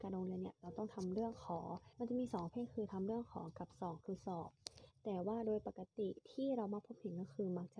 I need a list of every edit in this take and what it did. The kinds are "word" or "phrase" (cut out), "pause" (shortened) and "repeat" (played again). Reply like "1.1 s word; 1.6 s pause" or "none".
1.9 s pause